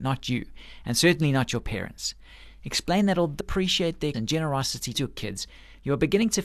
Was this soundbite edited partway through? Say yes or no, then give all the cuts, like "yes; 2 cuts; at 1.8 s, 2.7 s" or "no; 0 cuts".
yes; 3 cuts; at 3.4 s, 4.1 s, 4.9 s